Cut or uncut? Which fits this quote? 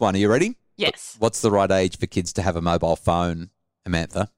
uncut